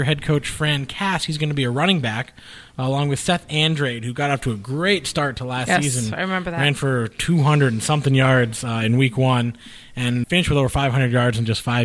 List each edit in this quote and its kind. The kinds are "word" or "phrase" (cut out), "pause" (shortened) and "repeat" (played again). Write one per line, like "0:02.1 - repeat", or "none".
0:10.2 - word